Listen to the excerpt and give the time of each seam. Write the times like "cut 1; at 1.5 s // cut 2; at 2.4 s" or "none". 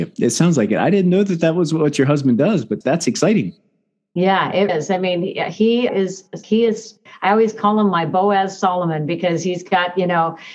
cut 1; at 2.8 s // cut 2; at 4.7 s // cut 3; at 5.9 s // cut 4; at 6.4 s